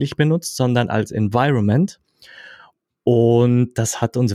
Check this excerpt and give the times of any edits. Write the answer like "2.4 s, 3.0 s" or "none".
none